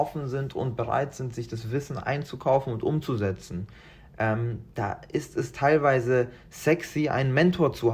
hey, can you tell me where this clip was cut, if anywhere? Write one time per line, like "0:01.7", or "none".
none